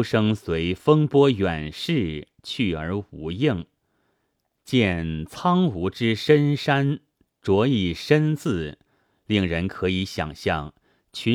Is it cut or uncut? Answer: uncut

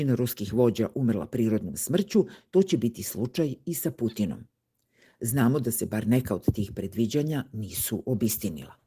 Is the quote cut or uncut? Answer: uncut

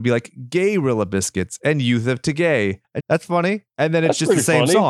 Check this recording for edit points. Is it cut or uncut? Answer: cut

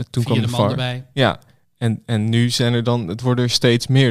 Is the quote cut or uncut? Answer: uncut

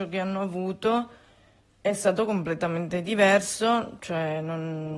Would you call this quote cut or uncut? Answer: uncut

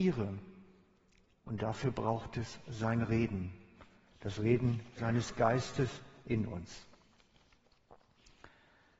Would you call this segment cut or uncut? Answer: uncut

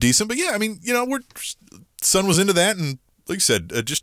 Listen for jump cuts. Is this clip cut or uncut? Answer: uncut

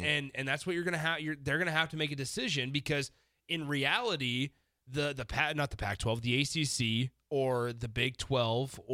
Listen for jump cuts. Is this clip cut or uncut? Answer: uncut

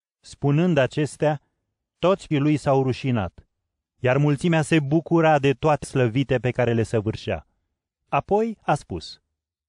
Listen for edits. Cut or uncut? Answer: cut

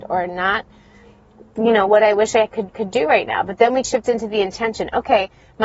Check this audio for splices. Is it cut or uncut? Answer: cut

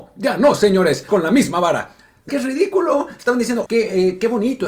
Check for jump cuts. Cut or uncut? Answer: cut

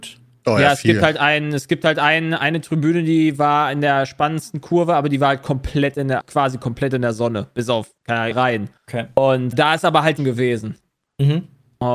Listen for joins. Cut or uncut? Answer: cut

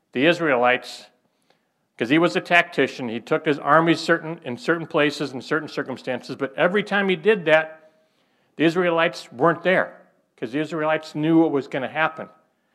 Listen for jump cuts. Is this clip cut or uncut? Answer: uncut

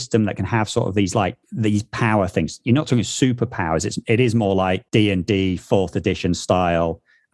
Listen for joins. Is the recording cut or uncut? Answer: cut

